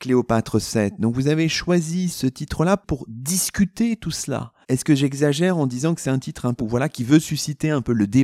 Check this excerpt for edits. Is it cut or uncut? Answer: cut